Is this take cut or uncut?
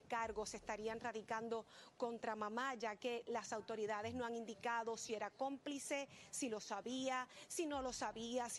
uncut